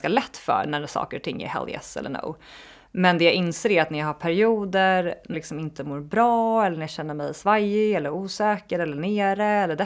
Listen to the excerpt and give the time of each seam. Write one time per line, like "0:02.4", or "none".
0:05.3